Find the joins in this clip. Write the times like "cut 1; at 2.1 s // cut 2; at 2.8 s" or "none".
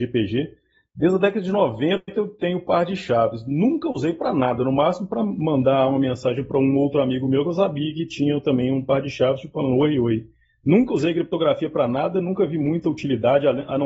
none